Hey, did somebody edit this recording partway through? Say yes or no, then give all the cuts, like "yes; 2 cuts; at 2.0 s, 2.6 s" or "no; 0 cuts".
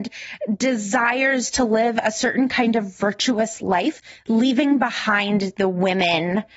no; 0 cuts